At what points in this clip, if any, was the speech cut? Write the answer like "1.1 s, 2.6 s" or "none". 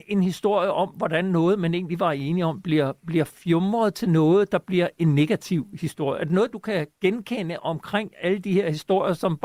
6.9 s